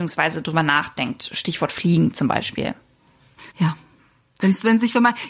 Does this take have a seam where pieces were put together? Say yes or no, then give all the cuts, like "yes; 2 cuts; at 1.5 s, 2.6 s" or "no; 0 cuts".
yes; 1 cut; at 3.5 s